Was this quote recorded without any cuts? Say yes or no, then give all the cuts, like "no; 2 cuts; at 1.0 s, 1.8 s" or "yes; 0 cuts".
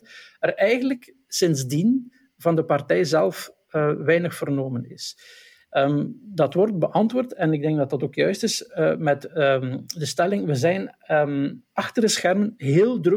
yes; 0 cuts